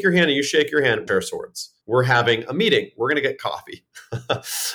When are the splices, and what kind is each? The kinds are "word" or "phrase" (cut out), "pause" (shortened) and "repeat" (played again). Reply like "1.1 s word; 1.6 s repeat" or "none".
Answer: 1.1 s phrase; 1.8 s pause